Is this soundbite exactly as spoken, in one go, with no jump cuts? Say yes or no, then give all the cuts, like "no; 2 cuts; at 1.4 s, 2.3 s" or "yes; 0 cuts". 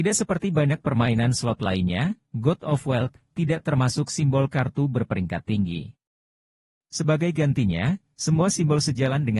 yes; 0 cuts